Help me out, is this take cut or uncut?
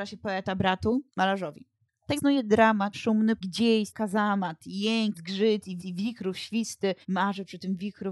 cut